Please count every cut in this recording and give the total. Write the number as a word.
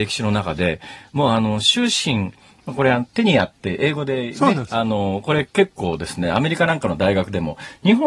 zero